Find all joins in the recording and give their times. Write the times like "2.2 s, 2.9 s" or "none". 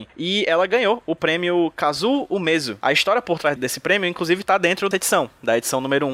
3.6 s, 4.9 s